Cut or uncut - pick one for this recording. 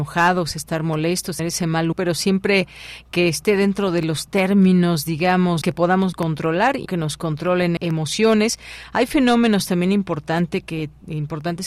cut